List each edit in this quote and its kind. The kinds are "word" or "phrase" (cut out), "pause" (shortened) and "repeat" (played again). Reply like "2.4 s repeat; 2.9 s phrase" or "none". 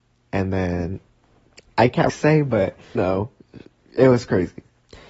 2.1 s word; 3.0 s word